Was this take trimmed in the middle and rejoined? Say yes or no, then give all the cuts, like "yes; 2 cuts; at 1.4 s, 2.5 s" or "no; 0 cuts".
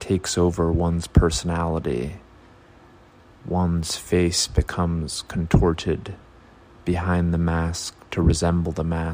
no; 0 cuts